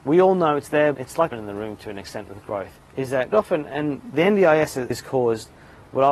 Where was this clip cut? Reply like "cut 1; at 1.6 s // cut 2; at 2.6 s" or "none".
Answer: cut 1; at 0.9 s // cut 2; at 1.3 s // cut 3; at 2.8 s // cut 4; at 3.3 s // cut 5; at 4.9 s